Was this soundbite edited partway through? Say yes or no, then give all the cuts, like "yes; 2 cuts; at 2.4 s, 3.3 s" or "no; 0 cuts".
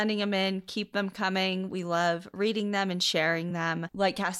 no; 0 cuts